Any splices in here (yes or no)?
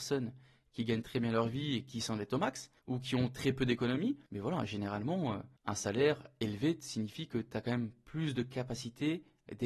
yes